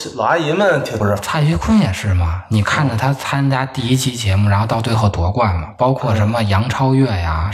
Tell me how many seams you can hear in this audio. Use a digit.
1